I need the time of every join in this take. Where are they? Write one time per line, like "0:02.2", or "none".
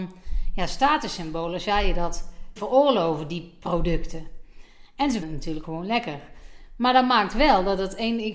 0:02.6
0:05.2
0:05.6